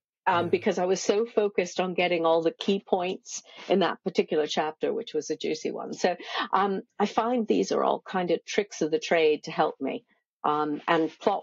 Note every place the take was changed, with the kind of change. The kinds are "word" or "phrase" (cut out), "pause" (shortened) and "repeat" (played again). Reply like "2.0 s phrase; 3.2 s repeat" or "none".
none